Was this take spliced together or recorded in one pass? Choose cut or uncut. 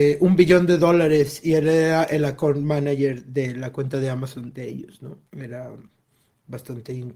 cut